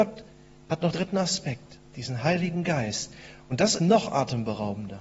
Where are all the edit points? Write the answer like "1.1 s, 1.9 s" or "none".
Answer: 0.9 s, 1.9 s, 3.8 s